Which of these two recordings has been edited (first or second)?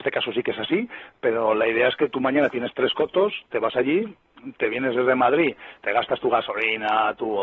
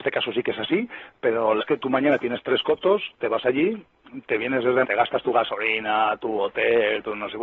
second